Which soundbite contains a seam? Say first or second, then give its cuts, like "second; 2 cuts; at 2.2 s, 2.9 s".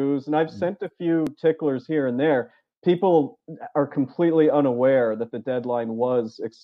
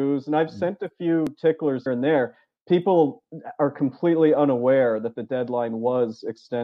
second; 1 cut; at 1.9 s